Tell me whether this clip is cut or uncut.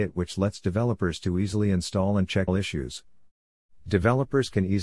cut